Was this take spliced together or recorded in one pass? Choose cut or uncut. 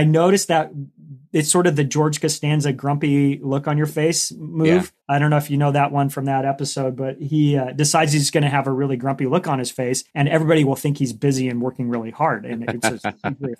cut